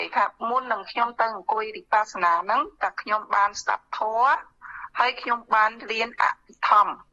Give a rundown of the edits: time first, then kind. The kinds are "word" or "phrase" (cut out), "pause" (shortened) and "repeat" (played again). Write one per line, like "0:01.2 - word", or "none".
none